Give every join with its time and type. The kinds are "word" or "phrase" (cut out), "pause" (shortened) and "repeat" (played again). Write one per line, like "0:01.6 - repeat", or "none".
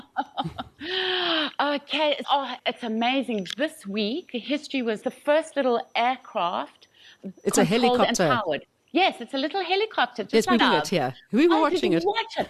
0:02.2 - word
0:02.6 - word
0:05.0 - phrase
0:10.6 - phrase